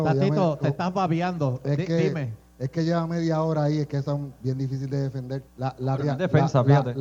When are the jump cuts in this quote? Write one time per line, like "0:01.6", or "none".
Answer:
0:05.5